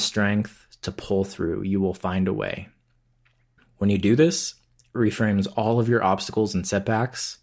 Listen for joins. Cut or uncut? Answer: uncut